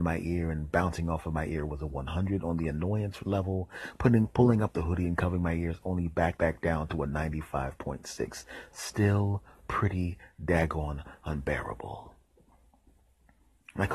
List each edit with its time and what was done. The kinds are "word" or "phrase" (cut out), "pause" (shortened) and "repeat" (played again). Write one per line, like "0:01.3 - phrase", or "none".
0:06.4 - word